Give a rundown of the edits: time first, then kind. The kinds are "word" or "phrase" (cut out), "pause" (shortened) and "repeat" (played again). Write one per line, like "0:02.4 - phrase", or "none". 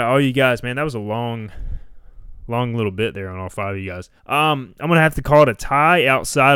0:04.2 - pause